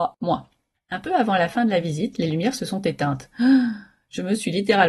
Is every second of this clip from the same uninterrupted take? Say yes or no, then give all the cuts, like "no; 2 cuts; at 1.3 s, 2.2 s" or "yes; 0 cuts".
yes; 0 cuts